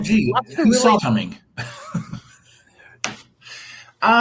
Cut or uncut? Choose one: cut